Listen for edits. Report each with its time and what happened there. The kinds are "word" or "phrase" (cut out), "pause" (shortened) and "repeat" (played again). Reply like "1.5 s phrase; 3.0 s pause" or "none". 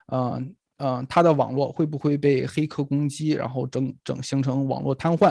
none